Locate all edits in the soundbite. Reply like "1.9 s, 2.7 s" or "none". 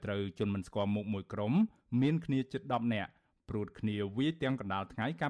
none